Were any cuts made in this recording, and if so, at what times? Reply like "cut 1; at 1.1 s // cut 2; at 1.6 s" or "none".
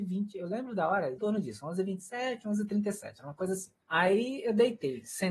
cut 1; at 1.2 s // cut 2; at 3.8 s